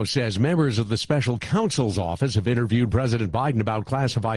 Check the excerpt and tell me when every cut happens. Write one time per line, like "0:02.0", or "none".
none